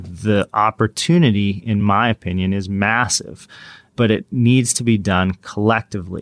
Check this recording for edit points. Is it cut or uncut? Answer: uncut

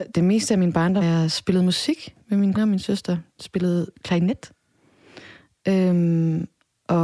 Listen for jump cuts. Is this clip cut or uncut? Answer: cut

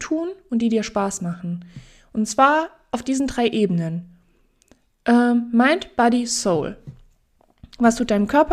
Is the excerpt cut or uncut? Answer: uncut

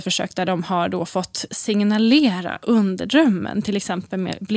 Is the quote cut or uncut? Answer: cut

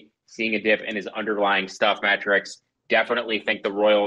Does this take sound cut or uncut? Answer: uncut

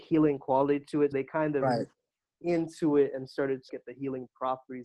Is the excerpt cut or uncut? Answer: cut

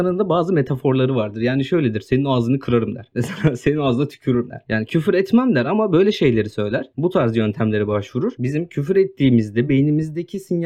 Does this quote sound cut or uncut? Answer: uncut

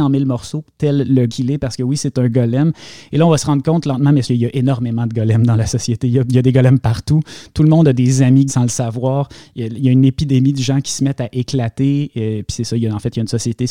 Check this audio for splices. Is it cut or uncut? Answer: cut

